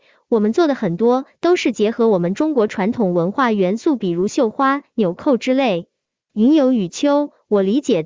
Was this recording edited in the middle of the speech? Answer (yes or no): no